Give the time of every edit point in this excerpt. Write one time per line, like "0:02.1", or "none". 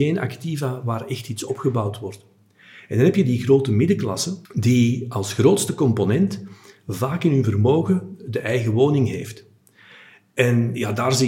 0:04.5